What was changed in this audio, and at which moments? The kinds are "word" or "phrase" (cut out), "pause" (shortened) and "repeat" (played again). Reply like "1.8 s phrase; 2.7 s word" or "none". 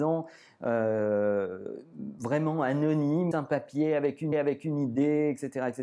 3.3 s phrase; 4.3 s repeat